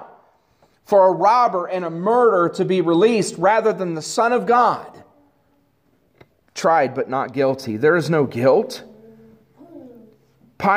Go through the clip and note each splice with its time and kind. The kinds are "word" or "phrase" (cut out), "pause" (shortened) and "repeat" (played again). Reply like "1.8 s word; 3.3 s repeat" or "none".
none